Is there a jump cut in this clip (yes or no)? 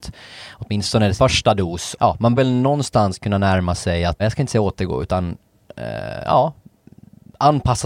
yes